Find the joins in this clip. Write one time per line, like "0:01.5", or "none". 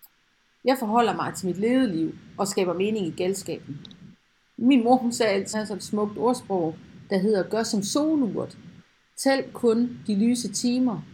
0:05.5

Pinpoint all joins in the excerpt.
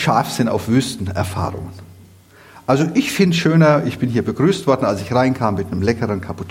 none

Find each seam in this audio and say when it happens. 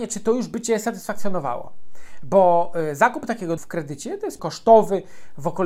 0:03.6
0:04.4

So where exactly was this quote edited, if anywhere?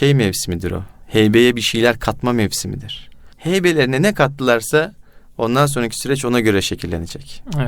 0:03.3

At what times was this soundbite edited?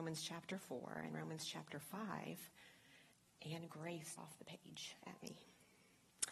0:04.2

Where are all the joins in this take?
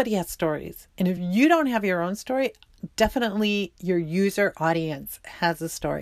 none

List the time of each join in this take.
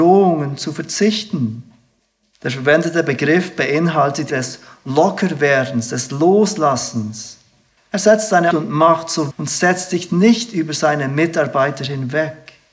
0:02.0
0:04.3
0:07.8
0:08.5
0:09.3

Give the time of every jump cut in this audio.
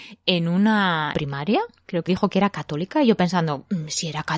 0:01.1
0:02.1

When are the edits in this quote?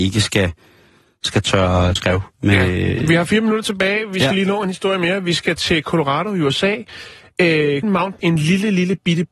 0:02.0
0:07.8
0:08.2

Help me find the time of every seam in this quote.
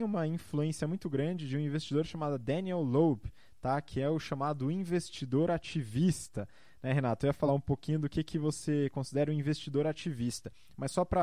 none

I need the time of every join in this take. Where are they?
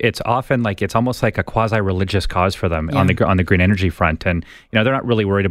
none

